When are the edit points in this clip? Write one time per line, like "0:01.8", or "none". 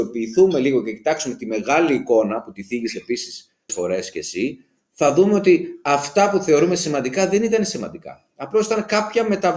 0:03.7